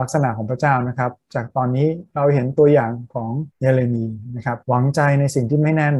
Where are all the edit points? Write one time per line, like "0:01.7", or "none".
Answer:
0:03.5
0:04.6